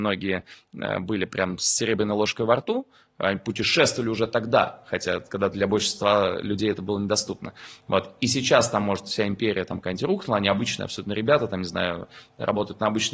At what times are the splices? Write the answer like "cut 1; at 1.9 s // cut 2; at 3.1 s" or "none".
none